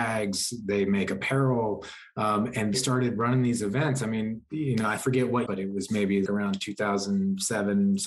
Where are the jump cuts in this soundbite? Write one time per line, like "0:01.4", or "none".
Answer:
0:02.7
0:05.0
0:05.5
0:06.3